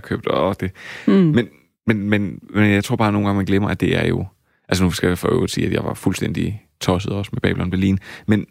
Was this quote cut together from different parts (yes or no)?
no